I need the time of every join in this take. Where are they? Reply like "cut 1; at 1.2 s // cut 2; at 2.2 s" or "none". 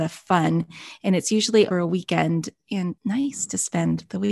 cut 1; at 1.7 s // cut 2; at 3.0 s